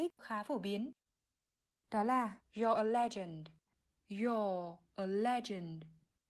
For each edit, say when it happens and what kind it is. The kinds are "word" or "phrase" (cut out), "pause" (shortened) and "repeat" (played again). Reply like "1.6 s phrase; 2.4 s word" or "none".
2.4 s pause